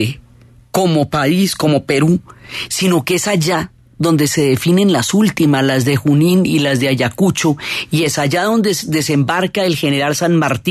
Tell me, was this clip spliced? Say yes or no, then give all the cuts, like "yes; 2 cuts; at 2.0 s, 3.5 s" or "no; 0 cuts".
no; 0 cuts